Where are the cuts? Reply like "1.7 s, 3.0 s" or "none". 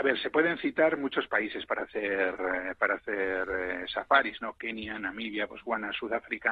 none